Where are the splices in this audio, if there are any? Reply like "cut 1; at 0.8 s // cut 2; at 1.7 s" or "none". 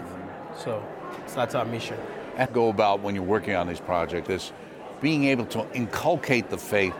cut 1; at 1.3 s // cut 2; at 2.5 s // cut 3; at 4.3 s